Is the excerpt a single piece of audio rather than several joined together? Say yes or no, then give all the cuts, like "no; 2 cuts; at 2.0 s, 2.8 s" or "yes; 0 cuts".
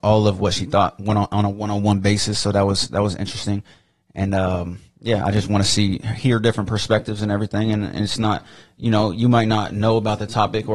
yes; 0 cuts